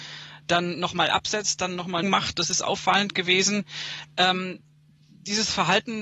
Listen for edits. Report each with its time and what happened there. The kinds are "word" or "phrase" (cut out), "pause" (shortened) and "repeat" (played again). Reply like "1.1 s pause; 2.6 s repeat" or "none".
2.0 s phrase